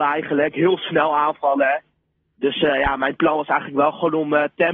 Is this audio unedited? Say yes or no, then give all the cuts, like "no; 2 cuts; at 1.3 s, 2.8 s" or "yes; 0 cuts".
yes; 0 cuts